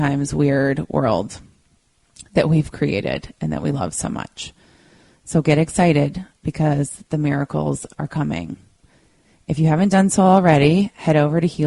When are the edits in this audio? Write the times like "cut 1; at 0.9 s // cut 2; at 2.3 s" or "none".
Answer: none